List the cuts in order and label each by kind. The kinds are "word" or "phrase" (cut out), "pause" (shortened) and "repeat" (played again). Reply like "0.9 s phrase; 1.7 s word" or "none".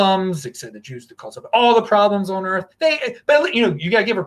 2.7 s pause